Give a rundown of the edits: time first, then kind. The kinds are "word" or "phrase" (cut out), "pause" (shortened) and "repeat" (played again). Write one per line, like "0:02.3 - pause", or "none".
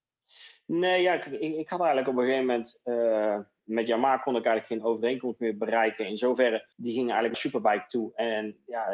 0:06.7 - pause
0:07.3 - phrase